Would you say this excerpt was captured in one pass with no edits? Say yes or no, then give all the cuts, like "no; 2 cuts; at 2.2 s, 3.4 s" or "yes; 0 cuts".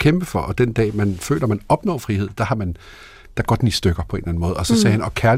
yes; 0 cuts